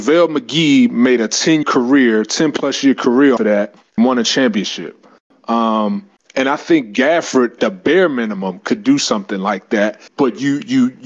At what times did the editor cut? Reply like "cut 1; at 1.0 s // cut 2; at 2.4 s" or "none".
cut 1; at 1.6 s // cut 2; at 3.4 s // cut 3; at 4.0 s // cut 4; at 6.2 s // cut 5; at 7.6 s // cut 6; at 10.1 s